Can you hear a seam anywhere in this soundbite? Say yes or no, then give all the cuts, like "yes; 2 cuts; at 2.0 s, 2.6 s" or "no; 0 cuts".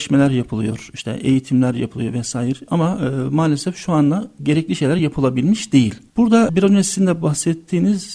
no; 0 cuts